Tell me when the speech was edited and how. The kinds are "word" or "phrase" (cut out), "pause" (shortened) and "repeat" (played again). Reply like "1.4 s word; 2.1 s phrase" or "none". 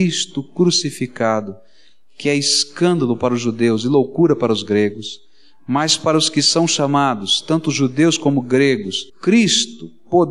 9.1 s pause